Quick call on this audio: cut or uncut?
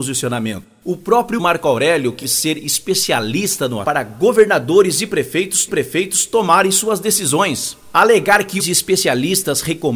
cut